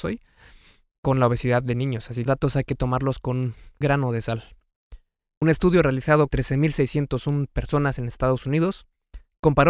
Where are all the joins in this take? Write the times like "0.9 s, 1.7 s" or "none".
2.3 s, 3.8 s, 5.4 s, 6.3 s